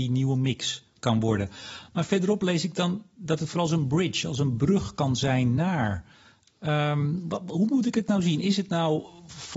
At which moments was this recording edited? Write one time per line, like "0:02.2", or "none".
none

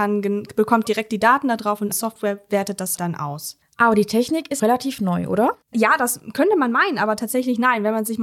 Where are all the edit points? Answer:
0:01.9
0:03.0
0:04.6
0:05.6

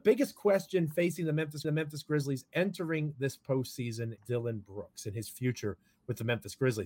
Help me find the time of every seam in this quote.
0:01.6
0:04.2

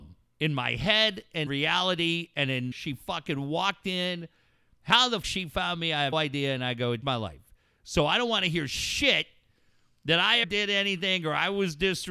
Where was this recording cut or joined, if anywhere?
0:01.5
0:02.7
0:05.2
0:06.1
0:07.0
0:10.4

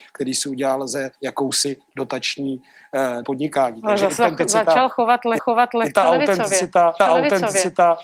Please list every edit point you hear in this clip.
0:01.2
0:03.2
0:04.2
0:05.4
0:07.0

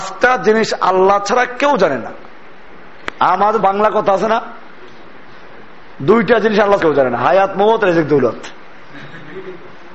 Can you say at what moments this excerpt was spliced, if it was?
0:03.6
0:06.8

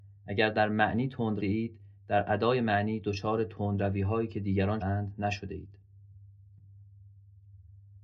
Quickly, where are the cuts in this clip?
0:01.4
0:04.8

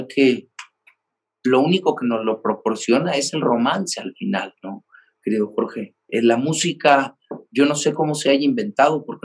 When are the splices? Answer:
0:06.1

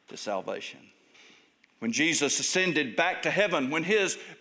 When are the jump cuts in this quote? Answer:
0:01.1

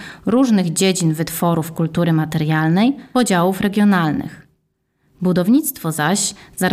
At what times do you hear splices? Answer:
none

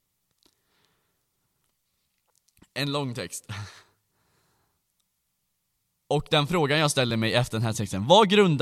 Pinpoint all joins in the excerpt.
none

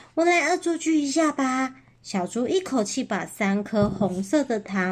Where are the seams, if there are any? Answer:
none

